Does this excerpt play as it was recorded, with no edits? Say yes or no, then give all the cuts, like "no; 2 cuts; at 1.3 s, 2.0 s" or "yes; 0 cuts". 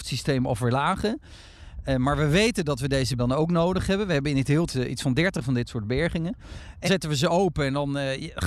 no; 3 cuts; at 3.2 s, 4.7 s, 6.9 s